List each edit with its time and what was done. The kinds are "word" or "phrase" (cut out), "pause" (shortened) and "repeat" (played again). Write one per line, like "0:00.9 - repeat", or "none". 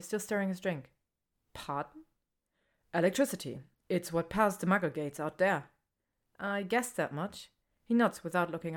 none